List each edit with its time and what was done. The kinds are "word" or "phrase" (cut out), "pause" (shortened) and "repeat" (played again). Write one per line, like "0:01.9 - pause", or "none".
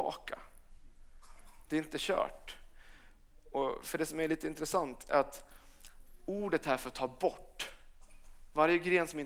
none